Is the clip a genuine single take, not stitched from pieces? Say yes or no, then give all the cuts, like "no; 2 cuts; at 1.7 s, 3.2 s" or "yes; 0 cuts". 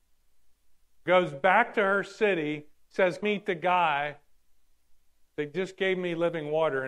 no; 1 cut; at 3.2 s